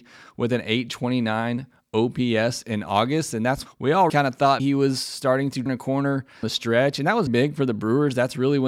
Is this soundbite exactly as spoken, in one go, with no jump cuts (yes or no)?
no